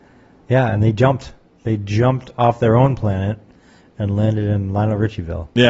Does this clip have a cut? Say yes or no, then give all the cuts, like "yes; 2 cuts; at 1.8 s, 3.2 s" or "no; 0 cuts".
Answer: no; 0 cuts